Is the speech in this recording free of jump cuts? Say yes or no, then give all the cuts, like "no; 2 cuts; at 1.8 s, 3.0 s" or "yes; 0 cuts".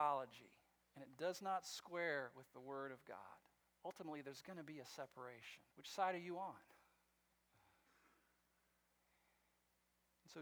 no; 2 cuts; at 3.6 s, 5.7 s